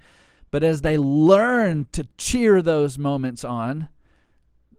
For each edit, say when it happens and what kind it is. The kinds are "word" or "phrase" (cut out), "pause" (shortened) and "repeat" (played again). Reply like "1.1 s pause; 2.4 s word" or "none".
none